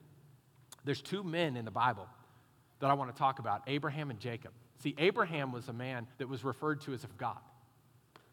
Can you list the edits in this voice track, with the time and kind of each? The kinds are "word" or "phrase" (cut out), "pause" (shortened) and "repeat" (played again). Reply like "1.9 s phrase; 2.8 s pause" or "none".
6.1 s pause; 7.1 s word